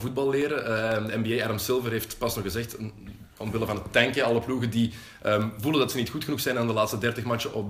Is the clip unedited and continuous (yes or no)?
yes